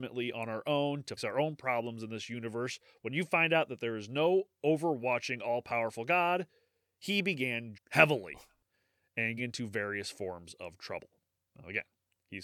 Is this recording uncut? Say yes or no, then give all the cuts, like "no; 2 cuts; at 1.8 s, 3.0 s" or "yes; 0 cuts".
no; 3 cuts; at 1.2 s, 7.7 s, 9.4 s